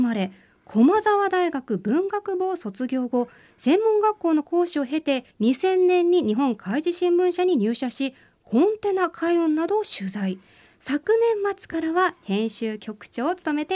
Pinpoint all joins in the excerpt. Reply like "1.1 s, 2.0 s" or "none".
5.3 s